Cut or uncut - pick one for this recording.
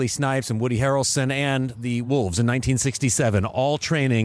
uncut